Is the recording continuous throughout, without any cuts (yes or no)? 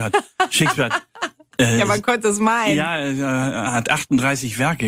yes